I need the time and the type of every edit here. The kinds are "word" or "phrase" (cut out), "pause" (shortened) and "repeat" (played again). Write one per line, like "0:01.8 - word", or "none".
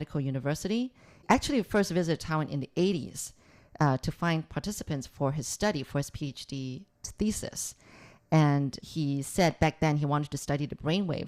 0:08.8 - word